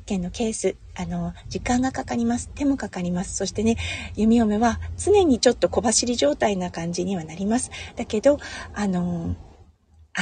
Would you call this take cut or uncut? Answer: uncut